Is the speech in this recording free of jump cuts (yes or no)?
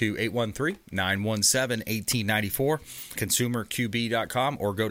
no